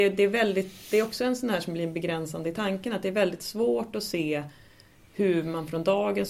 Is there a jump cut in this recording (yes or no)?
no